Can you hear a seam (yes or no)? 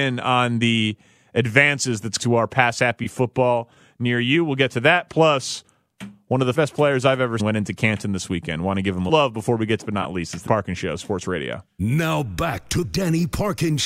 yes